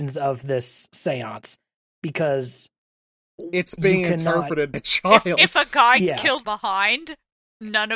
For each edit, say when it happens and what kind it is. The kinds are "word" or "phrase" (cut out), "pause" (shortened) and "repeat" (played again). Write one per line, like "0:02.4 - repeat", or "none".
0:04.7 - word
0:06.0 - word
0:06.4 - word